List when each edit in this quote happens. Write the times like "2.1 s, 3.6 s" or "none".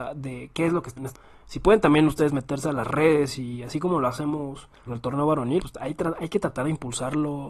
1.0 s, 4.9 s, 5.6 s